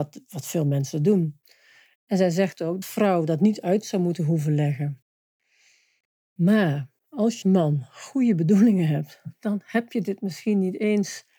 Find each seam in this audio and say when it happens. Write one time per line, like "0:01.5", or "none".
0:02.8
0:07.4